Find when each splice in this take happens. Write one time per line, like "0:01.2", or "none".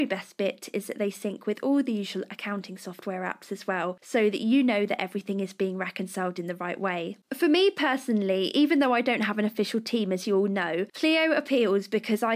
none